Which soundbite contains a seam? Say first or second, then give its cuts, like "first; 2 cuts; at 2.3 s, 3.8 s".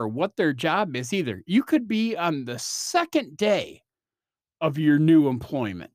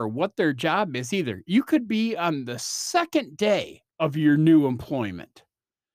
second; 1 cut; at 3.9 s